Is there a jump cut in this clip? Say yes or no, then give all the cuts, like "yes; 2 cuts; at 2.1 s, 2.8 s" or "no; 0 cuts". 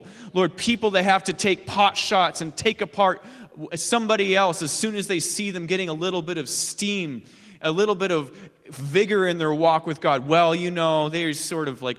no; 0 cuts